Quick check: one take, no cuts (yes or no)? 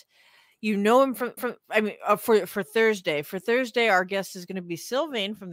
no